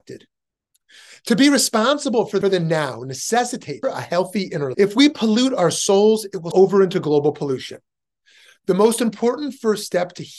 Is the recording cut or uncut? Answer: cut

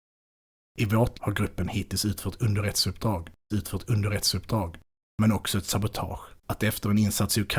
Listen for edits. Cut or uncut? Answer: cut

